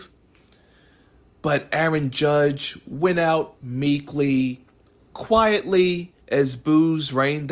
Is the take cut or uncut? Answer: cut